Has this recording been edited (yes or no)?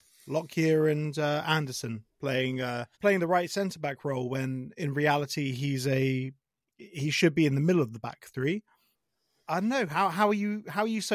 yes